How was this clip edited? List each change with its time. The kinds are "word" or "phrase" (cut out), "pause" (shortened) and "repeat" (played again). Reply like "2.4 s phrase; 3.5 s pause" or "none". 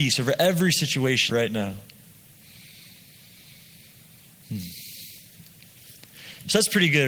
1.3 s phrase